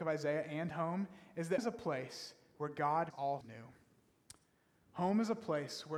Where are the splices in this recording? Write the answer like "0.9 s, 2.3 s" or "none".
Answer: 1.6 s, 3.1 s, 3.4 s